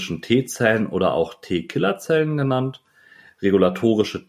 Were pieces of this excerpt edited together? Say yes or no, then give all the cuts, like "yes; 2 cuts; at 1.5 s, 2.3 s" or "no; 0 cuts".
no; 0 cuts